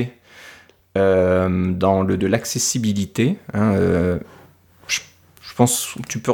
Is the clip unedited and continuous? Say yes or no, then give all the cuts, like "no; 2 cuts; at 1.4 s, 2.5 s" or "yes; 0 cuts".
no; 1 cut; at 2.2 s